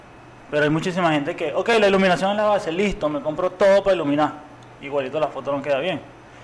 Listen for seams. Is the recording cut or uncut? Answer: uncut